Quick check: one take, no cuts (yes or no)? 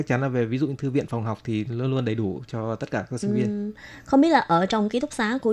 yes